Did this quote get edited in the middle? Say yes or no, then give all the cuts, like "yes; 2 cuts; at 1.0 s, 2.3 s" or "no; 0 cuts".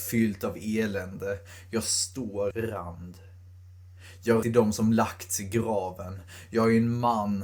yes; 2 cuts; at 2.5 s, 4.4 s